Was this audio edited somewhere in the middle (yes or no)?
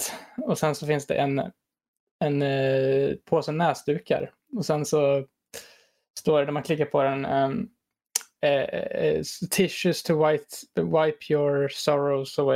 no